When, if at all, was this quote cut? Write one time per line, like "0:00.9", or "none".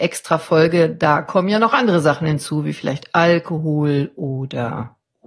none